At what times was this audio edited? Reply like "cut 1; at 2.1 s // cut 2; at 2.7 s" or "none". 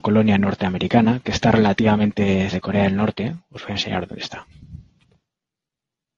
cut 1; at 2.5 s